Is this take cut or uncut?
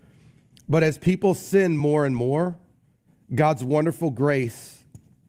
uncut